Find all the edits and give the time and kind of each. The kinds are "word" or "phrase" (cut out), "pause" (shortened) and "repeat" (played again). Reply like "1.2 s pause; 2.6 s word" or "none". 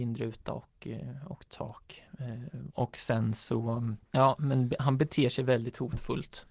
2.7 s phrase; 4.0 s pause

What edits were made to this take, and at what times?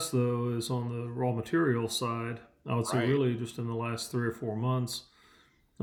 none

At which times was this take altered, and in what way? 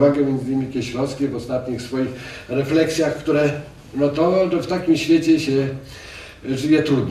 none

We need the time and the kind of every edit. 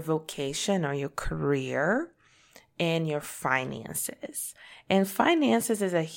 none

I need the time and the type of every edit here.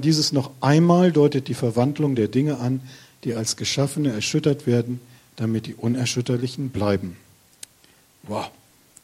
none

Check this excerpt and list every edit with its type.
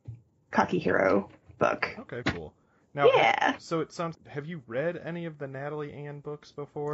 2.2 s word; 4.1 s word

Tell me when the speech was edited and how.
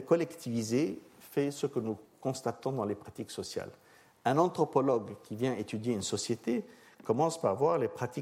none

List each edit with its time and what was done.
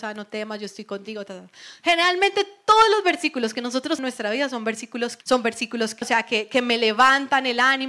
4.0 s phrase; 5.2 s word; 6.0 s word

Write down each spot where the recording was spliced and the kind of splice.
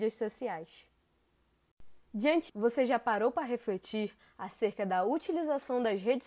2.5 s word

